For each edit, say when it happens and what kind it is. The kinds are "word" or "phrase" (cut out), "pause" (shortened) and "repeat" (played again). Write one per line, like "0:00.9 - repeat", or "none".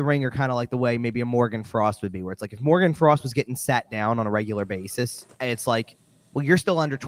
0:05.3 - pause